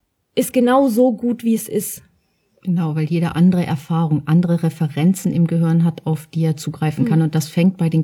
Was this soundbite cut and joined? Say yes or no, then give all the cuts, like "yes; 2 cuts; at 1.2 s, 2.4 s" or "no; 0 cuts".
no; 0 cuts